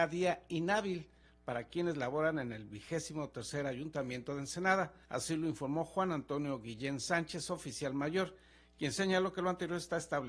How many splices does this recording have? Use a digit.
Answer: 1